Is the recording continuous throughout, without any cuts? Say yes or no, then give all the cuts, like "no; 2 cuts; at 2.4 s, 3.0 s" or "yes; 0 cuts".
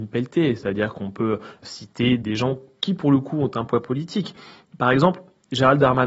yes; 0 cuts